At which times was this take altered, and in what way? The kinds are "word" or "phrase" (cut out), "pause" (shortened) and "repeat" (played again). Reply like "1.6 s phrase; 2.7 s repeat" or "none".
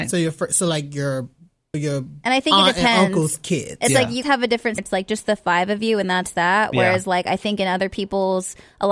1.7 s word; 4.2 s word; 4.8 s phrase